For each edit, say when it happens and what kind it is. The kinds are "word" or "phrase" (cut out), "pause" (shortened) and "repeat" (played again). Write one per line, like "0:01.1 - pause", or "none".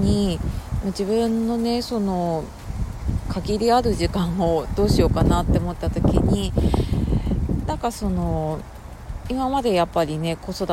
none